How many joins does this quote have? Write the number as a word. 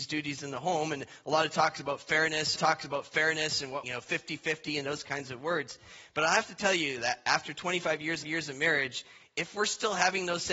three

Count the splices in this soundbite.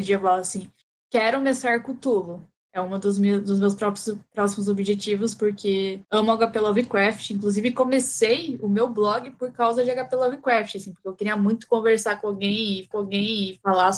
two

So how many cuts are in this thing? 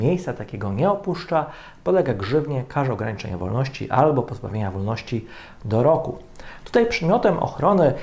zero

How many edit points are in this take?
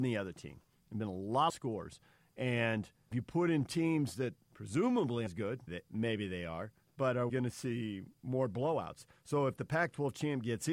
six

